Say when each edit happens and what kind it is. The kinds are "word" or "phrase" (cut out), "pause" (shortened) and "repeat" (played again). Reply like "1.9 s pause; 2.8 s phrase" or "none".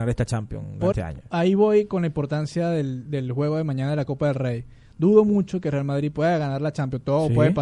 0.9 s phrase